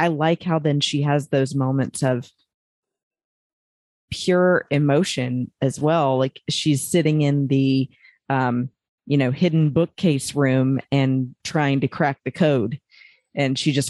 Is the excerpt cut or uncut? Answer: uncut